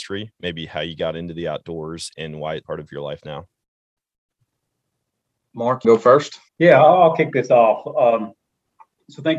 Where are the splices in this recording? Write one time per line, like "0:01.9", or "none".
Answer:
0:02.1
0:02.6
0:05.8
0:06.5